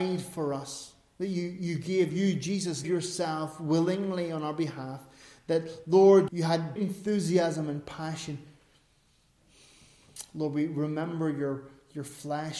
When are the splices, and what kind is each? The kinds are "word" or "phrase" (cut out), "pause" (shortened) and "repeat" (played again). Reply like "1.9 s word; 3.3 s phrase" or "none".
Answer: 2.8 s word; 6.3 s word; 6.8 s word